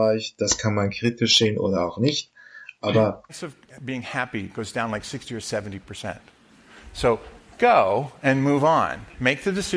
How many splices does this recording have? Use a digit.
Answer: 2